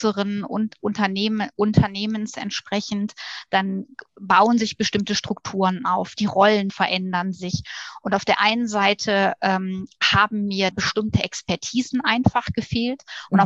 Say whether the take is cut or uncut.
cut